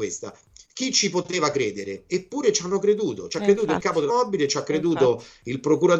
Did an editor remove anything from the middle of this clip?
yes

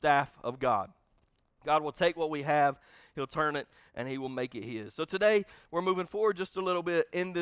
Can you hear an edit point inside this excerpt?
no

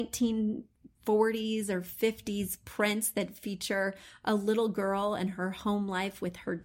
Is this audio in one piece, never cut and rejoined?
no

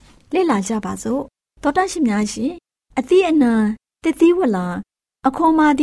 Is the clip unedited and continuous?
yes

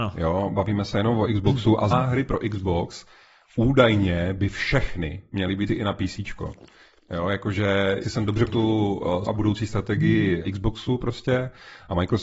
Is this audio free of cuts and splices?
no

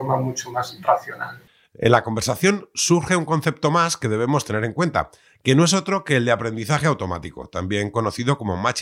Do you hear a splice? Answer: no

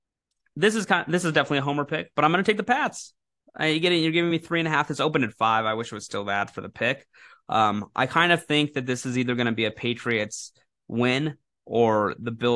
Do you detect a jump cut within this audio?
no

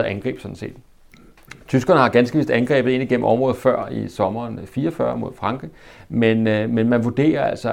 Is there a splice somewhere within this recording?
no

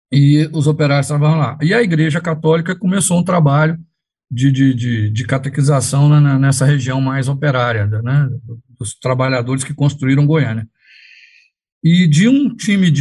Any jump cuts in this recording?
no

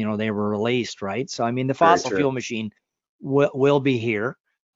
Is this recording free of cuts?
yes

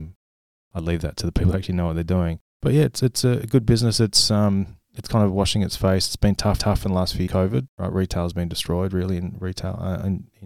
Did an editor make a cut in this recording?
yes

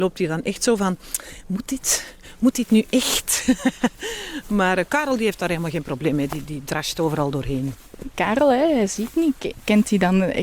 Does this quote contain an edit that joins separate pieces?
no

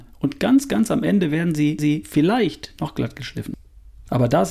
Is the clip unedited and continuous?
no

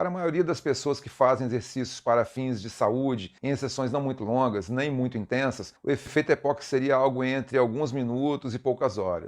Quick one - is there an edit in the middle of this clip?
yes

